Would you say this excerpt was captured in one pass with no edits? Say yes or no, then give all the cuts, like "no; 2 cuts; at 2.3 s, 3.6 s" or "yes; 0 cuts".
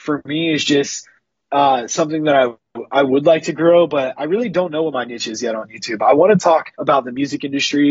no; 1 cut; at 6.7 s